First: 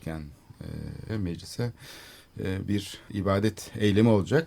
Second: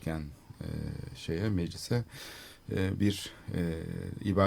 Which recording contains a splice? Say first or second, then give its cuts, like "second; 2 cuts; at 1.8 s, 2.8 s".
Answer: first; 2 cuts; at 1.1 s, 3.1 s